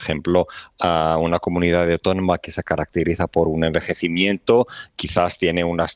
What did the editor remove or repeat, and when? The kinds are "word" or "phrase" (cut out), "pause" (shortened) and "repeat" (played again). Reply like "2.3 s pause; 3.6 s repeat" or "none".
none